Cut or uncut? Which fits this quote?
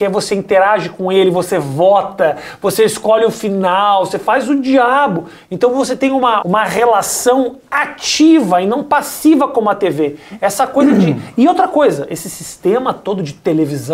cut